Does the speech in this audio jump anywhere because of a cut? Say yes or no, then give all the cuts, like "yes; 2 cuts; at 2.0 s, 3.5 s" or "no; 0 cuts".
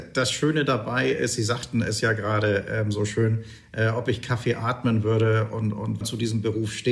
yes; 1 cut; at 6.0 s